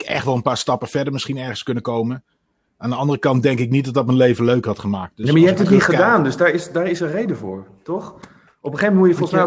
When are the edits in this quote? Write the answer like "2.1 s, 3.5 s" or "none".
none